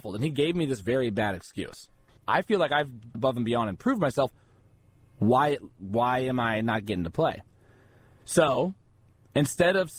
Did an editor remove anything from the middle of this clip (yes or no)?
yes